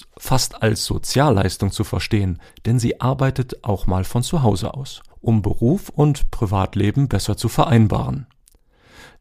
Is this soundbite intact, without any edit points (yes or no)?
no